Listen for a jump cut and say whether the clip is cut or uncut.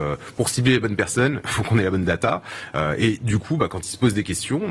uncut